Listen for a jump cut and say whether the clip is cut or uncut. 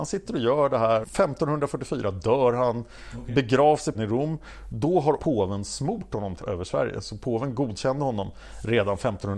cut